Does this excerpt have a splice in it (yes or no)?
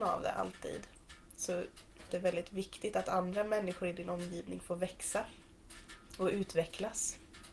yes